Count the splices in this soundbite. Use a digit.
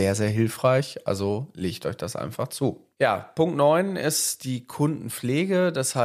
1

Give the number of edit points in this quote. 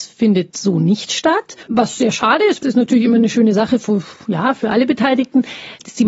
2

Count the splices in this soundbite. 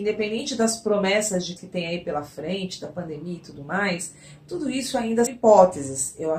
2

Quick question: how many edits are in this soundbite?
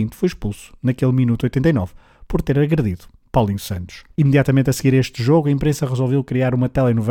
1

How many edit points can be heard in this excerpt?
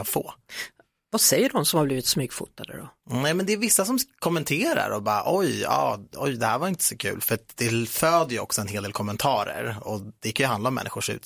0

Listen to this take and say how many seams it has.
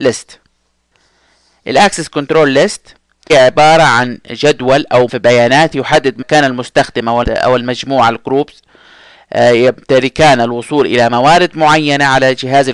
4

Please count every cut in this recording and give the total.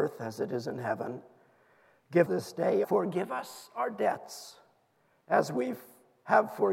2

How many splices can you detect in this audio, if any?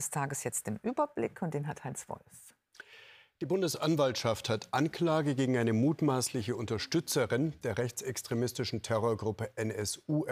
0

